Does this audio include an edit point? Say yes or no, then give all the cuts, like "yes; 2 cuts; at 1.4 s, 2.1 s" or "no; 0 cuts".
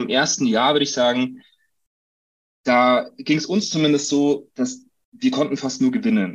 no; 0 cuts